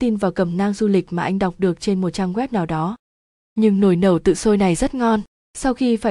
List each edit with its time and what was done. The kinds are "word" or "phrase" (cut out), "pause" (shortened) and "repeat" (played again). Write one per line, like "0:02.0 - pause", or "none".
none